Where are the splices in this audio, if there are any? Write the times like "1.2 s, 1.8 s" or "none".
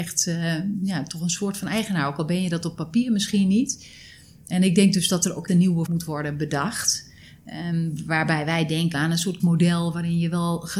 5.5 s, 5.9 s, 8.9 s, 9.4 s